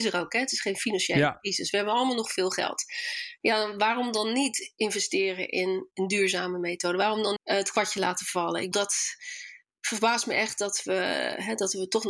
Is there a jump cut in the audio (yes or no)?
yes